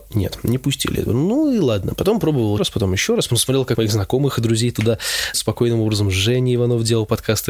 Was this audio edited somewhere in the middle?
yes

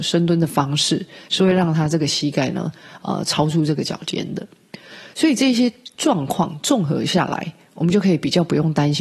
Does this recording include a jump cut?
no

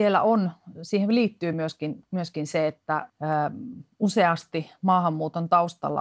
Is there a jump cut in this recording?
no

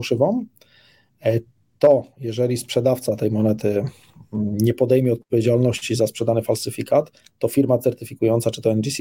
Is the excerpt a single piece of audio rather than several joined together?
yes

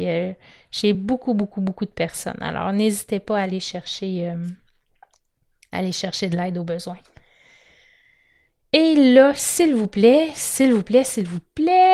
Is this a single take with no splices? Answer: yes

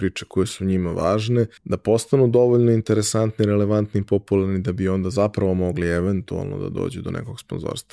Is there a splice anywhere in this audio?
yes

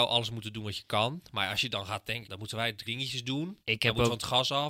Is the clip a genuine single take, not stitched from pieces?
no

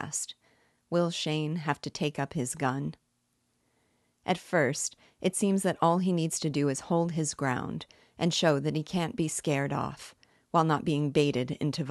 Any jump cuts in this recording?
no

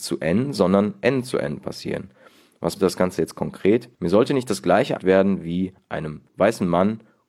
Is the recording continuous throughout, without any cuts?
no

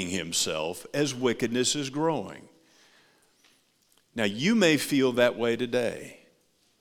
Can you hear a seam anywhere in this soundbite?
no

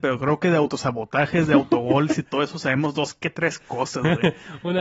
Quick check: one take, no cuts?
yes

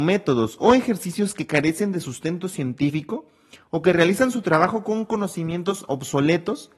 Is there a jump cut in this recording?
no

